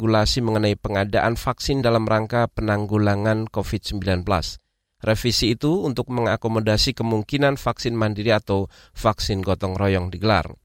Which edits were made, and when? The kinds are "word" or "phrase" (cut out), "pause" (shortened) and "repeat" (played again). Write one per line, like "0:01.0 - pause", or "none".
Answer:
none